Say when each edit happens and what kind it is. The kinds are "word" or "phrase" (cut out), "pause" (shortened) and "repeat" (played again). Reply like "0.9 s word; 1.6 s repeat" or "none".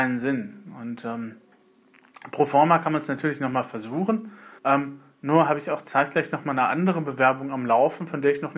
4.6 s pause